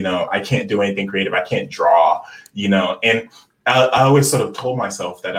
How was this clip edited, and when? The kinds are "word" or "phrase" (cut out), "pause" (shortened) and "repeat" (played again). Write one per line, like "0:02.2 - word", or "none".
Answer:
none